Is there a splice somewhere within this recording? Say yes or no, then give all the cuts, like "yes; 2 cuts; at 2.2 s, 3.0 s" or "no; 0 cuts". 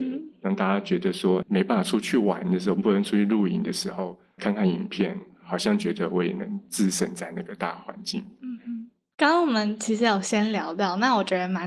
yes; 2 cuts; at 1.4 s, 4.4 s